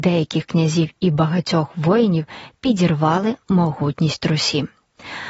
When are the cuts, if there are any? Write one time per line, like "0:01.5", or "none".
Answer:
none